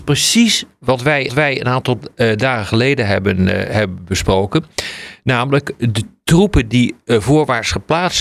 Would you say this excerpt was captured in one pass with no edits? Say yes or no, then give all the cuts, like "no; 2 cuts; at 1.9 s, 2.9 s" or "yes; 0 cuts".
no; 1 cut; at 1.3 s